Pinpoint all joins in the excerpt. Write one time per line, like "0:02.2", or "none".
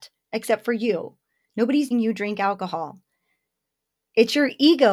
0:01.9